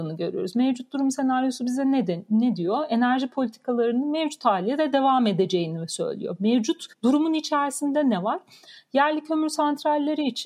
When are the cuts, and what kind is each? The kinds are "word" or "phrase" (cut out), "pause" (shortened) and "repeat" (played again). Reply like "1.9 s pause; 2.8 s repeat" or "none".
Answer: 6.9 s pause